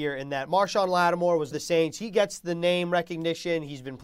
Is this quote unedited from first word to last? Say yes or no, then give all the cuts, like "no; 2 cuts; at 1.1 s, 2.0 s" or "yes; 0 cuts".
no; 1 cut; at 1.5 s